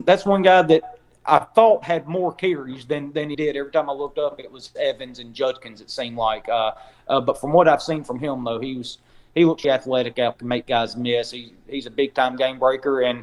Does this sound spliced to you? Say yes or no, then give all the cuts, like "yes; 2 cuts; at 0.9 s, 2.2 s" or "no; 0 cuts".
yes; 3 cuts; at 3.3 s, 9.6 s, 10.4 s